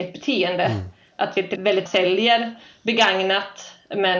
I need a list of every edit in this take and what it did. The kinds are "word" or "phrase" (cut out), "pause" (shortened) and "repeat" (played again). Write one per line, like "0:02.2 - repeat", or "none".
0:01.6 - word
0:01.9 - word